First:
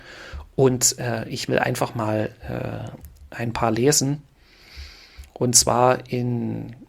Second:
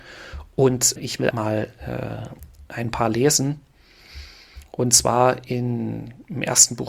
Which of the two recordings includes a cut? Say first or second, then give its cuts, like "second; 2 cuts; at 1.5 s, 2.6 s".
second; 2 cuts; at 1.0 s, 1.3 s